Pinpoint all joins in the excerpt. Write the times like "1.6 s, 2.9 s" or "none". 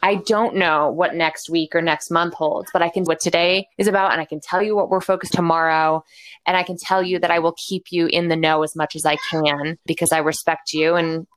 3.1 s, 3.7 s, 5.3 s, 9.9 s